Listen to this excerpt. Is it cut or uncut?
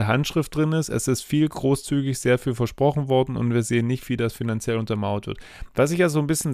uncut